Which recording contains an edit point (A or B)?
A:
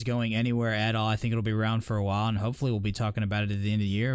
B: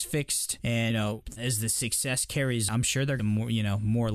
B